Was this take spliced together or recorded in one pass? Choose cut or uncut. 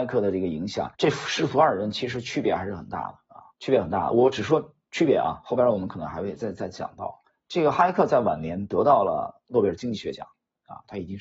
cut